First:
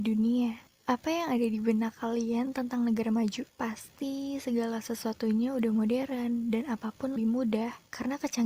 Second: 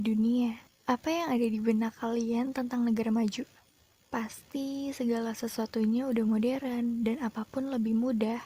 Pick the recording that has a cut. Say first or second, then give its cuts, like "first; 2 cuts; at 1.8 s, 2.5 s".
first; 2 cuts; at 3.5 s, 7.2 s